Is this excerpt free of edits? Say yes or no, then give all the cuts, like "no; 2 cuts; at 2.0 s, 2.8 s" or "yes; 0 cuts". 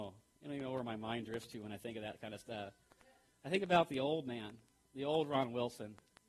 yes; 0 cuts